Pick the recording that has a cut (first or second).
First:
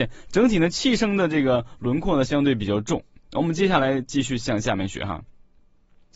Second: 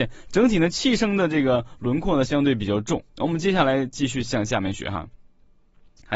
second